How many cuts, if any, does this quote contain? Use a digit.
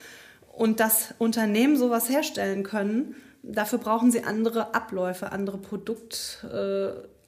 0